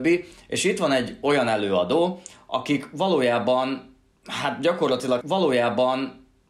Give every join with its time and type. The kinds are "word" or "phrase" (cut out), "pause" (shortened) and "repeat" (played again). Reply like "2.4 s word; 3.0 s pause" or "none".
5.2 s repeat